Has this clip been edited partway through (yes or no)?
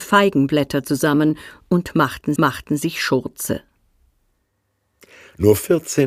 yes